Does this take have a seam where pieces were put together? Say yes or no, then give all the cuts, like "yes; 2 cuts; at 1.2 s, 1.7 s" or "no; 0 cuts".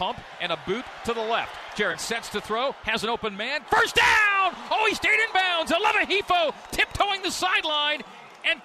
yes; 1 cut; at 3.7 s